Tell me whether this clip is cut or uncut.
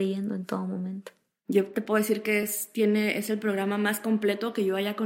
uncut